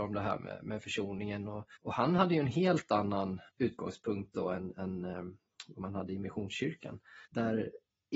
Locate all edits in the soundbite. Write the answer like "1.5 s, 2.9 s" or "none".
1.8 s, 3.5 s, 7.3 s